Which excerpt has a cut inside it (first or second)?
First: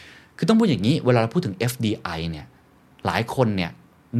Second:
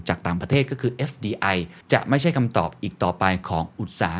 second